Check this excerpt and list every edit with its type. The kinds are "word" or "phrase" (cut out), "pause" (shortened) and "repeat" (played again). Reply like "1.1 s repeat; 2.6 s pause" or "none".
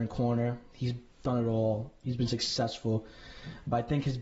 none